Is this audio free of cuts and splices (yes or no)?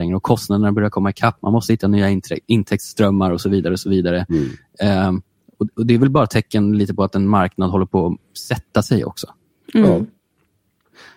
yes